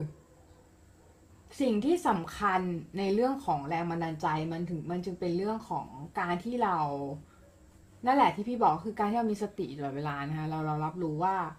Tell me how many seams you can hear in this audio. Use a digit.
0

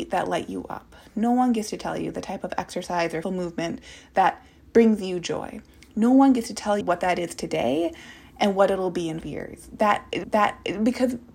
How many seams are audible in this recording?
4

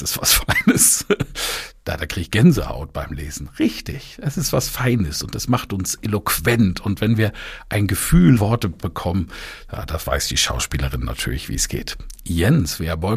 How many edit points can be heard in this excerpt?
1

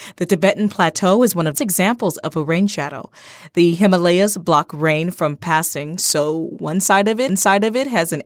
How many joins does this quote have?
2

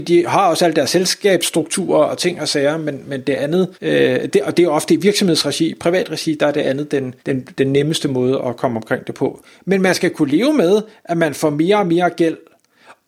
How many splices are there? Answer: 2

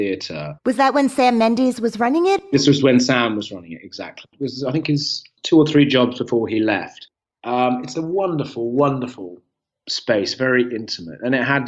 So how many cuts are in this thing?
0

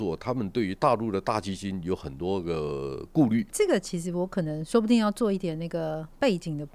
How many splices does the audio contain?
1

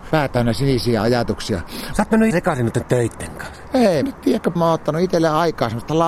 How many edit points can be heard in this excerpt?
3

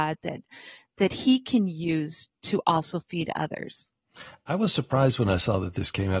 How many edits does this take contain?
0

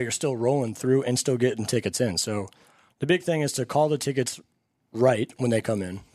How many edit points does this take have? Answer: 0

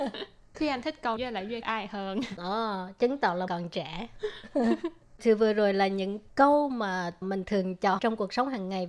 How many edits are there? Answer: 6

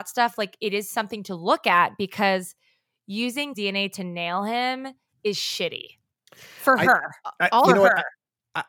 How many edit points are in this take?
1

